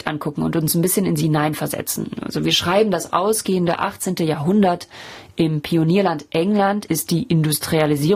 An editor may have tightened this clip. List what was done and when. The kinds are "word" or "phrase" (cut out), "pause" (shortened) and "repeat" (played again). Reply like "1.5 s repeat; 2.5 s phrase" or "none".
none